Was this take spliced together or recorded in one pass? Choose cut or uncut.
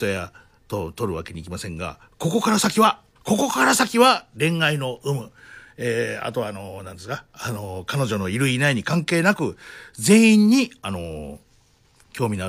cut